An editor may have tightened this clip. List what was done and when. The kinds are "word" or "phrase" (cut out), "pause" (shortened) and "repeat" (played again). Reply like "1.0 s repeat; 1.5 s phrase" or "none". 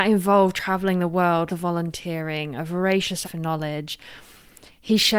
1.5 s word; 3.2 s word